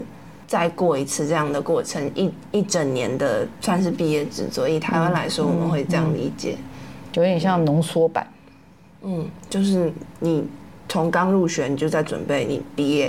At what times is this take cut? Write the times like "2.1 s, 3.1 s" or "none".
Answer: 9.5 s